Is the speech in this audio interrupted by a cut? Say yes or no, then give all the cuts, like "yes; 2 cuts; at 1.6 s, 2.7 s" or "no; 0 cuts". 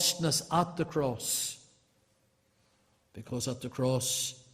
no; 0 cuts